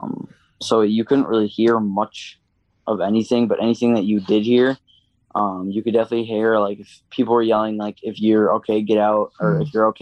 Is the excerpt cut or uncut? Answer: uncut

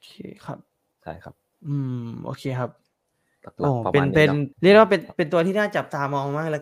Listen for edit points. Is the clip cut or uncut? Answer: cut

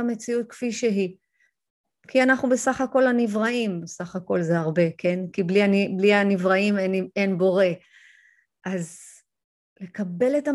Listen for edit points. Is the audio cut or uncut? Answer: uncut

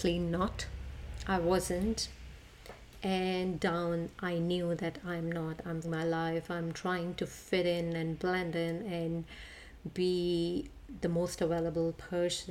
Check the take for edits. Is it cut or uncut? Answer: cut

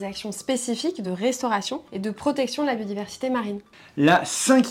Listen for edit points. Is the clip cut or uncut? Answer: uncut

